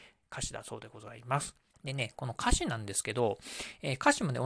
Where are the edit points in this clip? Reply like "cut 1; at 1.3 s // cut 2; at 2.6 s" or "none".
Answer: cut 1; at 1.7 s